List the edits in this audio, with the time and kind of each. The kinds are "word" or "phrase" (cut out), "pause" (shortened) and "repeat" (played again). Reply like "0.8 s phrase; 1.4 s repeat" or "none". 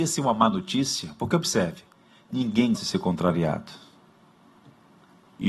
2.7 s word